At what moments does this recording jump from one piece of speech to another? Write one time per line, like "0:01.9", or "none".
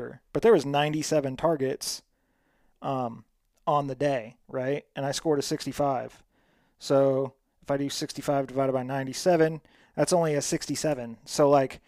none